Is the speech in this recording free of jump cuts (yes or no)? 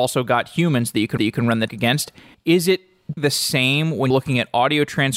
no